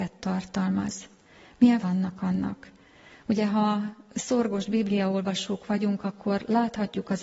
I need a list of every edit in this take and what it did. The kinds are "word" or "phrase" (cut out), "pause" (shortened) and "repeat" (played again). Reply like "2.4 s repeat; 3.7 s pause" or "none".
1.8 s word